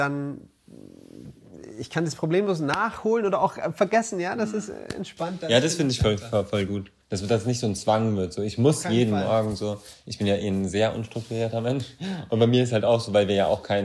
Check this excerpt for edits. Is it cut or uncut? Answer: cut